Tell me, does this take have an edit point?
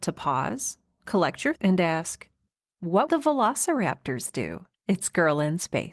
yes; 3 cuts; at 1.6 s, 3.1 s, 4.8 s

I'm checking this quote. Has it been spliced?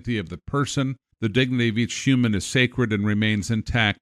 yes; 1 cut; at 1.1 s

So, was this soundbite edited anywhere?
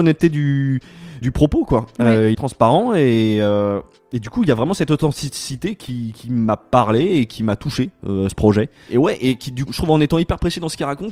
yes; 4 cuts; at 1.2 s, 2.3 s, 8.3 s, 9.7 s

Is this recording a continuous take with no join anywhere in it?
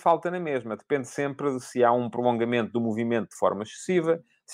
yes; 0 cuts

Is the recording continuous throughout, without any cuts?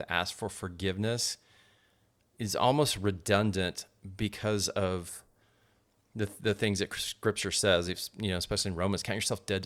yes; 0 cuts

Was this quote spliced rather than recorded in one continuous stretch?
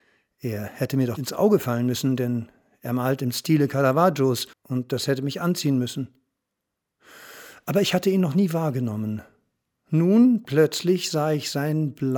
yes; 2 cuts; at 1.2 s, 4.5 s

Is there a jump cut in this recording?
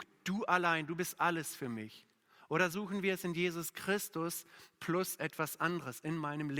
no; 0 cuts

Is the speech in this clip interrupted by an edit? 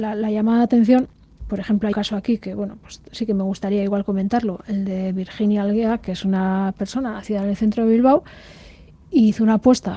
yes; 1 cut; at 1.9 s

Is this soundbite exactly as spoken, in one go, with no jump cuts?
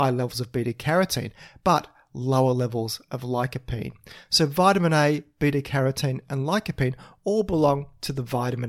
yes; 0 cuts

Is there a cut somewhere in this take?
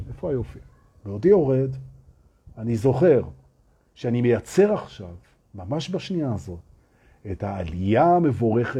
no; 0 cuts

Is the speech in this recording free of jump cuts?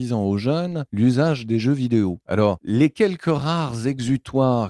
yes; 0 cuts

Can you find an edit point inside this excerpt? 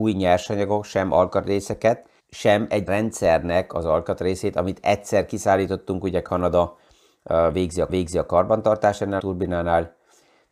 yes; 4 cuts; at 2.2 s, 2.9 s, 7.9 s, 9.2 s

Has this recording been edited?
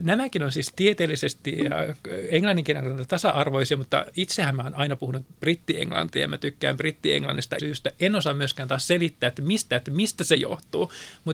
yes; 2 cuts; at 7.6 s, 9.7 s

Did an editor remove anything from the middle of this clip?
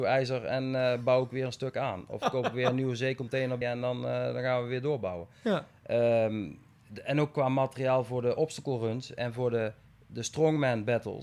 yes; 1 cut; at 3.6 s

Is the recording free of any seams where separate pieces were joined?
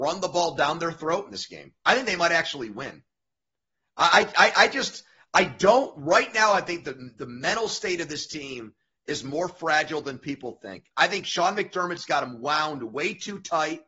yes; 0 cuts

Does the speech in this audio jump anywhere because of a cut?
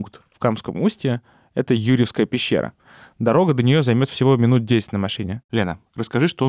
no; 0 cuts

